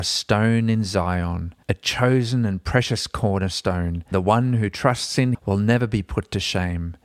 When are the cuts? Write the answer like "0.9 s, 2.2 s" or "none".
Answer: 1.6 s, 4.1 s, 5.3 s

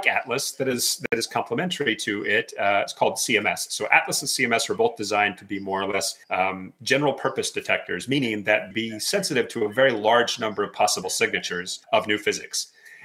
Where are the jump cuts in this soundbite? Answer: 6.2 s, 8.7 s, 11.8 s

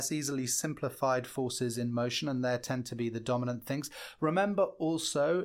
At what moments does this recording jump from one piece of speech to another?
none

